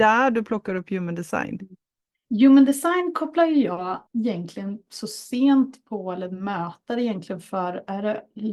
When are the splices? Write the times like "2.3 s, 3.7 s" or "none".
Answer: 4.1 s